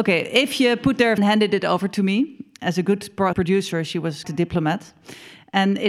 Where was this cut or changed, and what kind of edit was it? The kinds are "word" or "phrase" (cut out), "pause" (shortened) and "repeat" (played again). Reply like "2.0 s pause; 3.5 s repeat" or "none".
1.2 s phrase; 3.3 s word; 4.2 s word